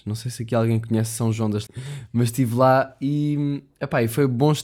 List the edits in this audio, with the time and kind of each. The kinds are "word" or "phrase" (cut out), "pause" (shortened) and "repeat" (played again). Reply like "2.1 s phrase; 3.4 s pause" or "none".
1.7 s word

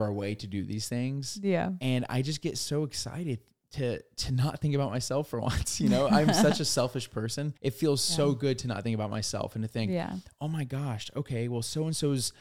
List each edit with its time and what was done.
7.6 s pause

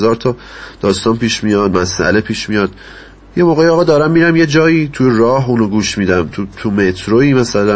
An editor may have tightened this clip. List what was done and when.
none

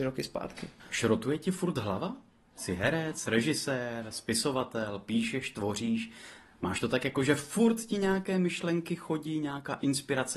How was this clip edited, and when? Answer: none

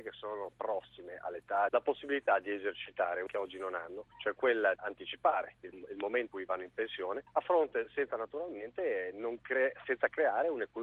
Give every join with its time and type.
1.7 s phrase; 3.3 s word; 4.1 s pause; 4.8 s word; 5.7 s word; 6.3 s word; 7.3 s pause

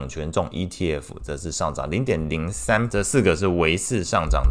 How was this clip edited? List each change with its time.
2.9 s word

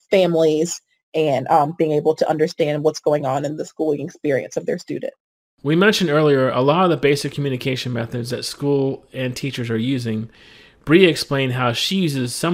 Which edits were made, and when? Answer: none

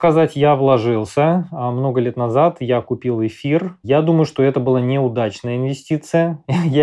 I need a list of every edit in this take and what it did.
none

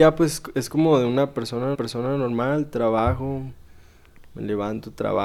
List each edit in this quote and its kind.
1.7 s repeat

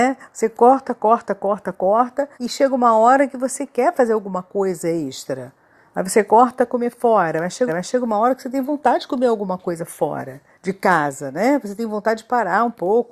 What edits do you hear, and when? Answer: 2.3 s pause; 7.7 s repeat; 10.5 s pause

